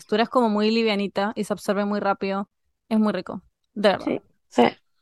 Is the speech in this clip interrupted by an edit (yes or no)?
no